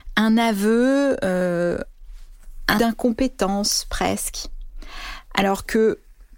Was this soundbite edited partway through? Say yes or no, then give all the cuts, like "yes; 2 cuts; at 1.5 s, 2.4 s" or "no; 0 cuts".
yes; 1 cut; at 2.8 s